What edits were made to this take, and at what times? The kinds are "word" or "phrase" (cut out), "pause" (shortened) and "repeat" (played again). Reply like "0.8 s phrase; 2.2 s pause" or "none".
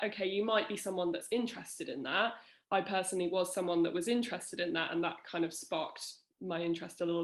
none